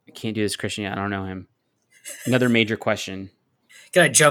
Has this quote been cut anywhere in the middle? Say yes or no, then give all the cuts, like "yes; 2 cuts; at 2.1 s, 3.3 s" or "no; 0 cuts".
no; 0 cuts